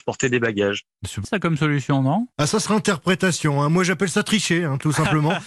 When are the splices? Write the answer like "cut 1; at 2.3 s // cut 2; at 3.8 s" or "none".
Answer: cut 1; at 1.2 s // cut 2; at 2.3 s // cut 3; at 2.7 s